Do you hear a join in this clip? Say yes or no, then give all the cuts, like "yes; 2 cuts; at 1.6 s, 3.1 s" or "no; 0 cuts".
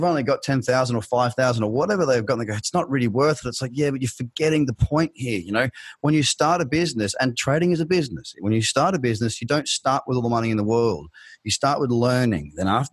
no; 0 cuts